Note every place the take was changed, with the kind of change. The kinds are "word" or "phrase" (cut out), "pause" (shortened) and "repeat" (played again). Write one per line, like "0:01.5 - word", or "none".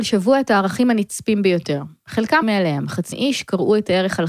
0:02.4 - word
0:03.1 - word